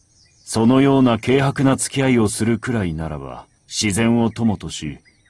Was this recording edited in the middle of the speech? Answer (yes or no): yes